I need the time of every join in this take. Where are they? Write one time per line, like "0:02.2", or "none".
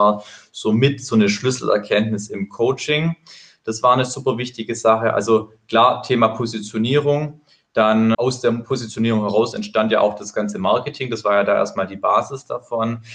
0:08.1